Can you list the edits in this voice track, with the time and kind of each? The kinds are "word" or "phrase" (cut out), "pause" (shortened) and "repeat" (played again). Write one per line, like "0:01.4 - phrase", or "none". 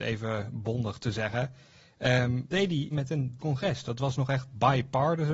0:02.5 - word
0:02.9 - word
0:03.4 - word